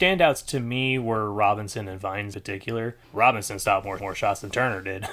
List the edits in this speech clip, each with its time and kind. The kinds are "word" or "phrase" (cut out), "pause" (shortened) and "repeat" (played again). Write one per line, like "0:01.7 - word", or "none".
0:02.3 - word
0:03.0 - pause
0:04.0 - repeat